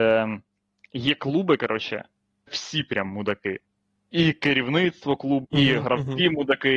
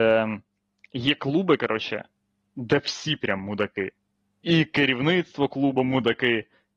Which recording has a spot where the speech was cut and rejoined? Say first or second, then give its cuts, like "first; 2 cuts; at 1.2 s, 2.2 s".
first; 2 cuts; at 2.5 s, 5.4 s